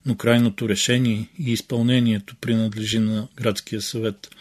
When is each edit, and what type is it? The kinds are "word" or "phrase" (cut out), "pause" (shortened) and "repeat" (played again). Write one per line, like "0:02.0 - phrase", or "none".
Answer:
none